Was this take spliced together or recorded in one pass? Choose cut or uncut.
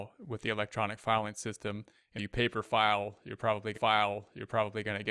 cut